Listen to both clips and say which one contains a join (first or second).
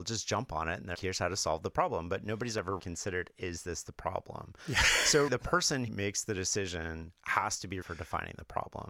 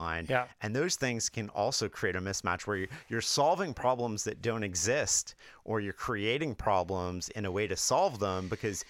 first